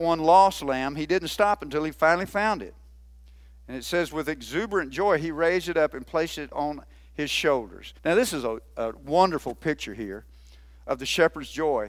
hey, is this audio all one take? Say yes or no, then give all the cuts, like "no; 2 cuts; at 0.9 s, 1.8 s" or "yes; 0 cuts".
no; 1 cut; at 8.0 s